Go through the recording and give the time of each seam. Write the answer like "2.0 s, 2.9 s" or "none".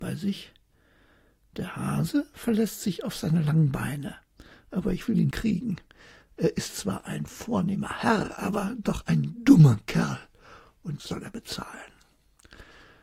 5.3 s, 11.0 s